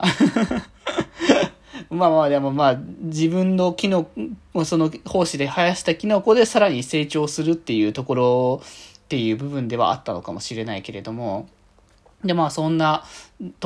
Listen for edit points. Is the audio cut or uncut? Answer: uncut